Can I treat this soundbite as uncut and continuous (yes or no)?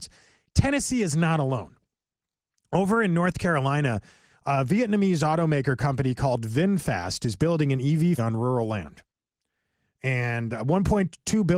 no